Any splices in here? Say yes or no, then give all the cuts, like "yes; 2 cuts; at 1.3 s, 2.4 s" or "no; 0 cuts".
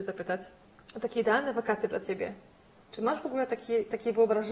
no; 0 cuts